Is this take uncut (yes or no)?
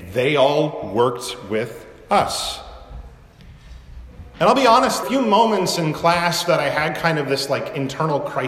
no